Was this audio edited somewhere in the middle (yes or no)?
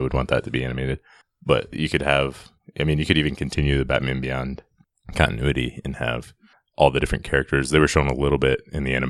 yes